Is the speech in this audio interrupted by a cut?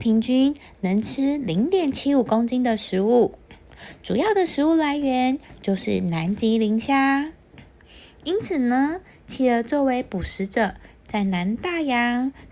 no; 0 cuts

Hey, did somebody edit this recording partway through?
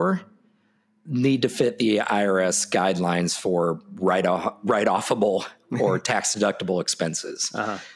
no; 0 cuts

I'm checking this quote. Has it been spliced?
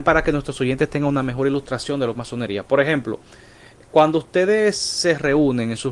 yes; 1 cut; at 2.1 s

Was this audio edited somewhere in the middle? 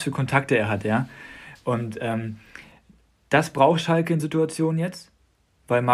yes; 1 cut; at 4.2 s

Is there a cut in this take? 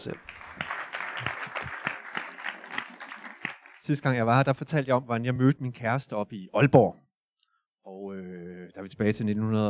no; 0 cuts

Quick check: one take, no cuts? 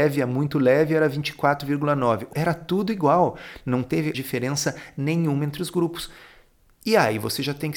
no; 2 cuts; at 2.3 s, 4.1 s

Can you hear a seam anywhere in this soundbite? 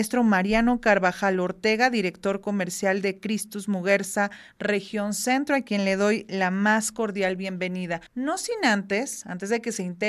yes; 1 cut; at 8.1 s

